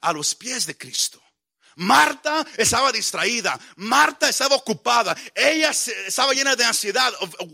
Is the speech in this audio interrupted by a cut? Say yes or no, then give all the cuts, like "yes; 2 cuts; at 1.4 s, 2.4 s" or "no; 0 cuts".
no; 0 cuts